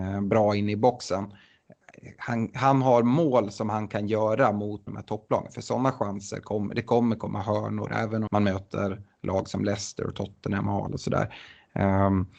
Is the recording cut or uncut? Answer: cut